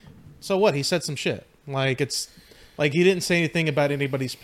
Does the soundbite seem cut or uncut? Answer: uncut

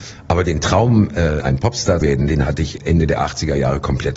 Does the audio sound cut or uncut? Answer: cut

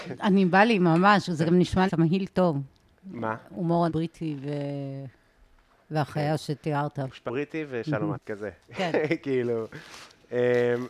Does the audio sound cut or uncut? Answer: cut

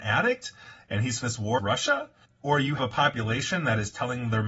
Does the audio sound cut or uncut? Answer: cut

